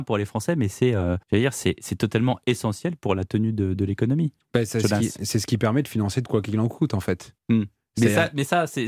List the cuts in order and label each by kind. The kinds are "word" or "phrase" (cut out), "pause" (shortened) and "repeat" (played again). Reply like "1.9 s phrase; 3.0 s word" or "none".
1.2 s pause; 7.4 s pause